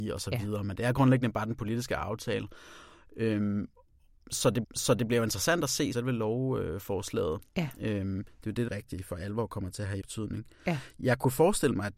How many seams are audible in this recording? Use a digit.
4